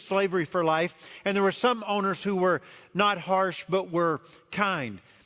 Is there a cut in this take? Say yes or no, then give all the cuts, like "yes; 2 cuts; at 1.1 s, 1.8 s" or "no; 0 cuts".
no; 0 cuts